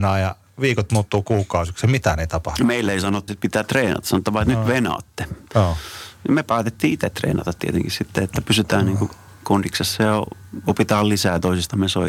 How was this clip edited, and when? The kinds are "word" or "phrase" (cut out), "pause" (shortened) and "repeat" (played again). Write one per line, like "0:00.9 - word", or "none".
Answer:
0:03.3 - word